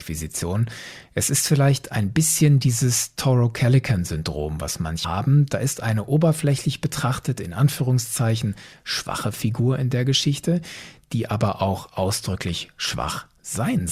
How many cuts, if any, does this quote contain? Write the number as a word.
one